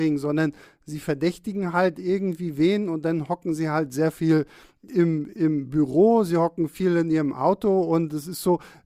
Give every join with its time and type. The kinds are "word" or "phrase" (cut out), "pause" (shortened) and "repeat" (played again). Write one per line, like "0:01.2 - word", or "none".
none